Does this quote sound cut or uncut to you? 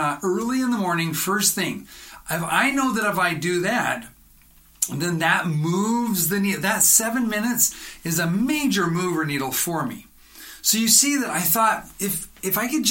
uncut